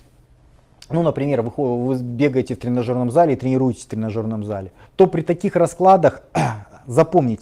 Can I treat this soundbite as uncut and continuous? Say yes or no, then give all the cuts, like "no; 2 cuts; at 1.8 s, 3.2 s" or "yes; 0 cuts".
no; 1 cut; at 4.8 s